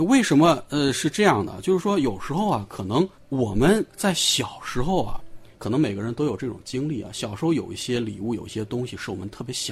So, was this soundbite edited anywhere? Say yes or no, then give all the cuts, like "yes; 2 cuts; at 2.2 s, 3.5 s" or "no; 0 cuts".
yes; 3 cuts; at 3.2 s, 3.9 s, 5.5 s